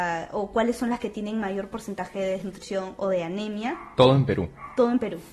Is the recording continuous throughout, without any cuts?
yes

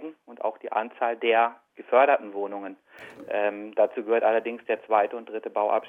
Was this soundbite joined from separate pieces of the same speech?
yes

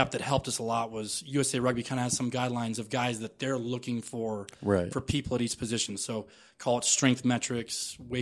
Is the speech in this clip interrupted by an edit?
no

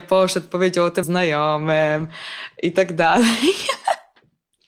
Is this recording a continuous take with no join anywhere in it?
no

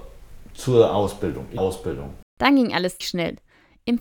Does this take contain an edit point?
yes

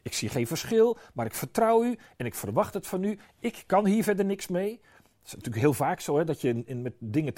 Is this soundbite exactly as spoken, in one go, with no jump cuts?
yes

